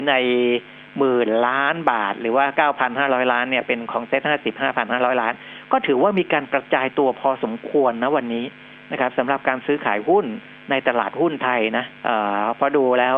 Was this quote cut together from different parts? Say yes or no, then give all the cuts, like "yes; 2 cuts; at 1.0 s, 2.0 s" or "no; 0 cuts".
yes; 1 cut; at 12.0 s